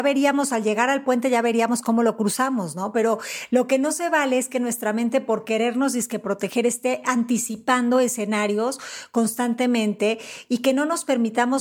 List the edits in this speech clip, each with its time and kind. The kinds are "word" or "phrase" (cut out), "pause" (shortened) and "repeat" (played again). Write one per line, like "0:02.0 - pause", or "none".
none

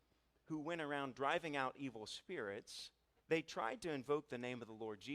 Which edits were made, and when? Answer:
0:03.2 - pause

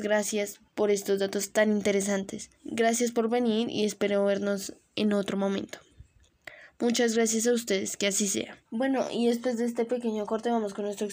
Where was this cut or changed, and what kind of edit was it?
0:02.6 - pause
0:08.6 - pause

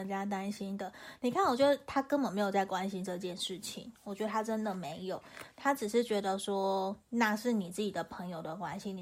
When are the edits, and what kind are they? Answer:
0:07.0 - pause

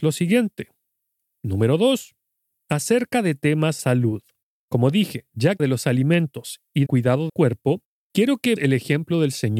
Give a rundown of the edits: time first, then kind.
0:03.8 - word
0:05.6 - word
0:06.9 - word
0:07.3 - word
0:08.6 - word

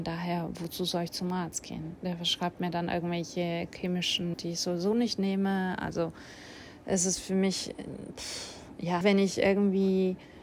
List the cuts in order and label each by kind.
0:04.3 - word
0:09.0 - word

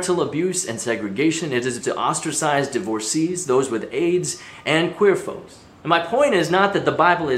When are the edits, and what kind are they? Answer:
0:01.8 - phrase
0:05.8 - pause

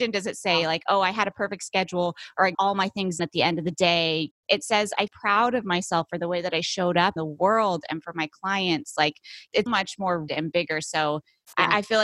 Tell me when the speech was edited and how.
0:02.5 - word
0:03.2 - word
0:05.1 - word
0:07.2 - word
0:09.7 - word
0:10.3 - word

